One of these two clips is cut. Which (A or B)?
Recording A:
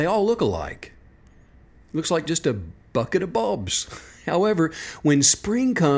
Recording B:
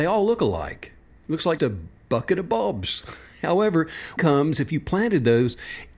B